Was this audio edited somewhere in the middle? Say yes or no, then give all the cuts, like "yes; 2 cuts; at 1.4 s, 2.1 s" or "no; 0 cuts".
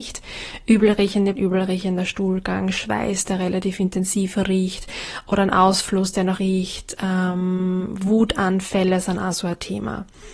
yes; 2 cuts; at 1.3 s, 6.4 s